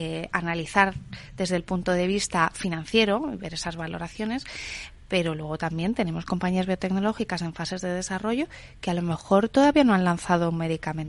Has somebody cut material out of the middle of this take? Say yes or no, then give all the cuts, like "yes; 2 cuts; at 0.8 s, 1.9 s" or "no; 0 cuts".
no; 0 cuts